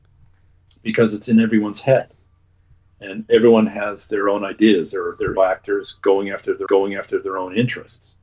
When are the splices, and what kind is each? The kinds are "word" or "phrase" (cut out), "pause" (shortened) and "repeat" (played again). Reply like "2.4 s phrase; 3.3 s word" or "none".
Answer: 5.4 s word; 6.7 s repeat